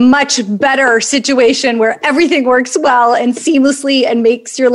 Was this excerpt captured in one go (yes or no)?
yes